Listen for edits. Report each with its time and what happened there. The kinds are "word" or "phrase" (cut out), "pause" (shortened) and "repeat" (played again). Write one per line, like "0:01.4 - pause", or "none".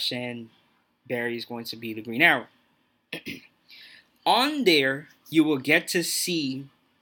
none